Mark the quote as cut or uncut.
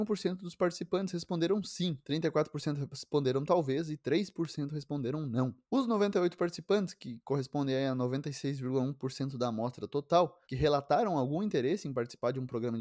cut